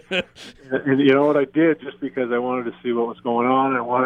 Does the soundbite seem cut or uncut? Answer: uncut